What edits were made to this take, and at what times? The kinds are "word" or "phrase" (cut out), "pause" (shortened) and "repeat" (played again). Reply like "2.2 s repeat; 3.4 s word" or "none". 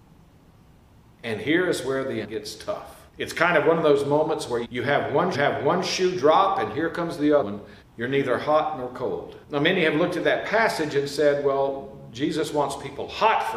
2.2 s word; 3.1 s pause; 4.6 s word; 5.3 s repeat; 7.4 s word; 7.8 s pause; 9.4 s pause